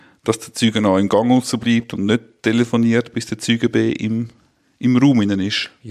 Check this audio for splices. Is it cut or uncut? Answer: uncut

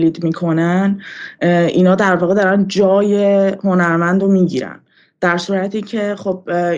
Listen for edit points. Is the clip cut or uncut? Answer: uncut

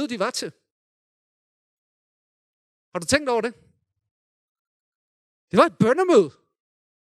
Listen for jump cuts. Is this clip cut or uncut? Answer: uncut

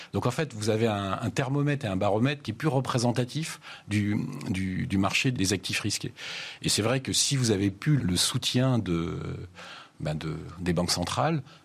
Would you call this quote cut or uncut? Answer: cut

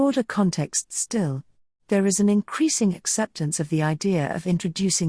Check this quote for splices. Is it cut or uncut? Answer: uncut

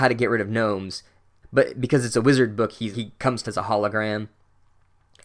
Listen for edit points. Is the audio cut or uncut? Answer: cut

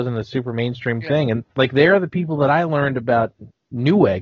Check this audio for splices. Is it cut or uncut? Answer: cut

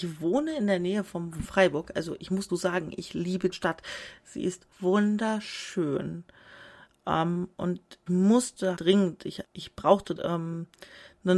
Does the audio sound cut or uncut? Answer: cut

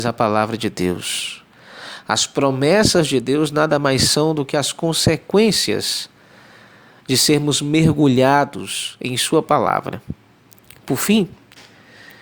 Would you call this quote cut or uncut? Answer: uncut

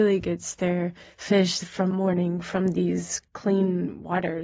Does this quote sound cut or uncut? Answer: cut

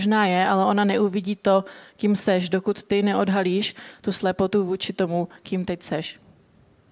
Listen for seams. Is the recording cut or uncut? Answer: uncut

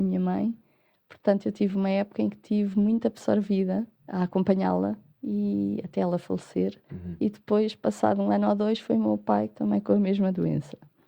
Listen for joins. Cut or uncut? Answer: cut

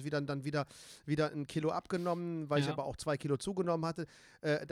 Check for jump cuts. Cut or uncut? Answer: uncut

